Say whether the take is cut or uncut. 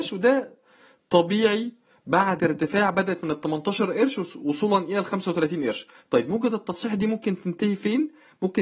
cut